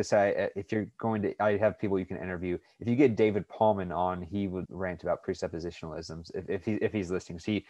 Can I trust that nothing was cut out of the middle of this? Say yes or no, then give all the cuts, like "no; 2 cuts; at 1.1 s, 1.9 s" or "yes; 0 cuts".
no; 1 cut; at 4.6 s